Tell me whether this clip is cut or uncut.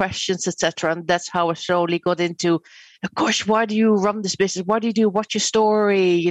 uncut